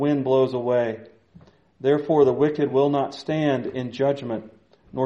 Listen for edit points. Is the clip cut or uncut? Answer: uncut